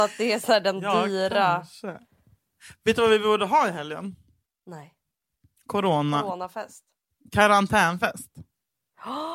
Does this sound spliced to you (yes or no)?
no